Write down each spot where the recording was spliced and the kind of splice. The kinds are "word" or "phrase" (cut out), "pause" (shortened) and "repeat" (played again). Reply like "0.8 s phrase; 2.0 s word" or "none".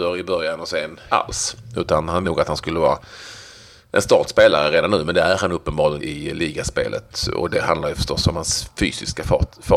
1.1 s word; 2.2 s word; 6.0 s word